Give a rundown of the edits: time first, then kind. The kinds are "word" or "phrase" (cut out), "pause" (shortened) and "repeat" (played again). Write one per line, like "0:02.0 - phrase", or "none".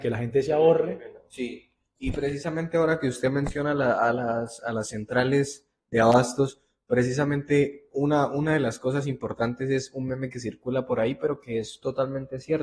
none